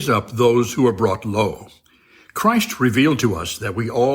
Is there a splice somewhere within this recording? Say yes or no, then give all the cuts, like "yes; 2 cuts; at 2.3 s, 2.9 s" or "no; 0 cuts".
no; 0 cuts